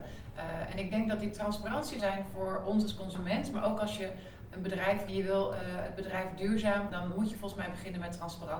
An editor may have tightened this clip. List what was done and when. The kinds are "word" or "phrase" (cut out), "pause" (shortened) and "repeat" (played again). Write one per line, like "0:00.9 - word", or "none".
0:02.0 - phrase
0:05.1 - phrase
0:06.9 - word

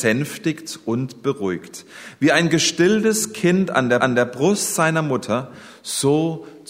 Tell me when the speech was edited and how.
0:04.0 - repeat

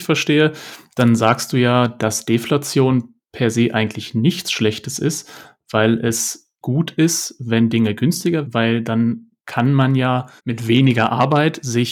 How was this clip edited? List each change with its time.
0:06.6 - word
0:08.4 - word
0:09.4 - pause
0:10.4 - pause

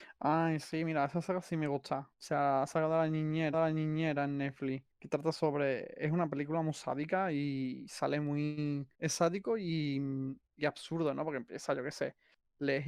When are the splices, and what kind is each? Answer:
0:02.1 - pause
0:03.5 - repeat
0:04.9 - pause
0:08.9 - pause
0:10.4 - pause

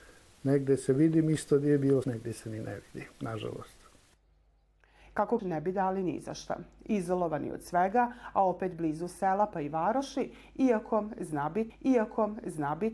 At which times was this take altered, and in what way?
0:02.0 - word
0:03.1 - pause
0:05.4 - phrase
0:11.7 - repeat

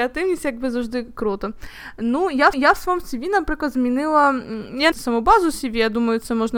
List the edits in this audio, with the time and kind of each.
0:02.5 - repeat
0:04.9 - phrase

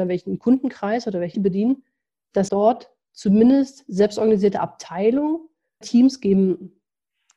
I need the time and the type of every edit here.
0:01.3 - word
0:02.5 - word
0:05.8 - word

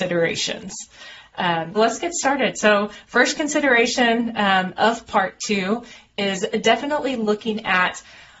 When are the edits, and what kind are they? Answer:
0:01.8 - word

